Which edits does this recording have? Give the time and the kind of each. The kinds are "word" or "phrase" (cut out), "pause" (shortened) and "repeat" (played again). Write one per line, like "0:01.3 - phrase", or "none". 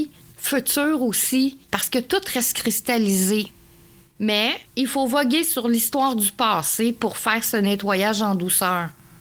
0:01.6 - pause
0:04.7 - pause